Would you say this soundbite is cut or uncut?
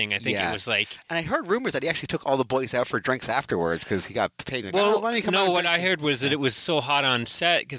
uncut